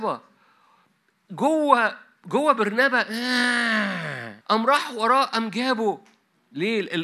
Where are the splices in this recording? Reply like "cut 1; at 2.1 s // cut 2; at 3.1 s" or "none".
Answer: cut 1; at 4.4 s